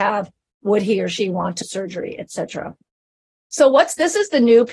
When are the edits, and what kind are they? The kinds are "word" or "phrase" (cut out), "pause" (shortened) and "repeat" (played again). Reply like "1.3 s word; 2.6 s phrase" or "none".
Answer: 1.6 s word